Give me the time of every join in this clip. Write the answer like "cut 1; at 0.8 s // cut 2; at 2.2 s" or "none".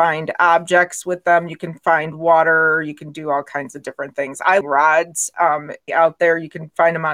cut 1; at 4.6 s // cut 2; at 5.9 s